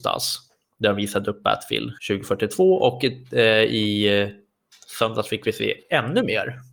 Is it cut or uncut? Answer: cut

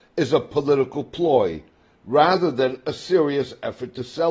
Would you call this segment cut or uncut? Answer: uncut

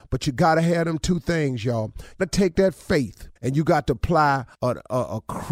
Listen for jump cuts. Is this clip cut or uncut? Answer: cut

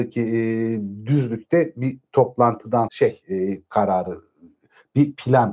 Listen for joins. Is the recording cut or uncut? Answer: cut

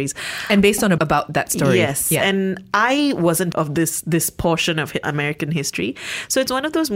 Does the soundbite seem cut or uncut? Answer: cut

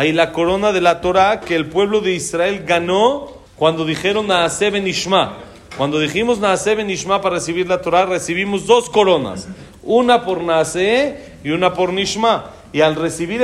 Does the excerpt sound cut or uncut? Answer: cut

